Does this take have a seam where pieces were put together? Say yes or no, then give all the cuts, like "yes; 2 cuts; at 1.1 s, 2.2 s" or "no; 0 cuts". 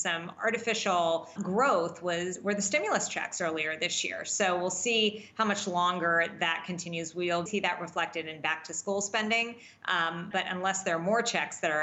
yes; 3 cuts; at 1.4 s, 7.5 s, 10.3 s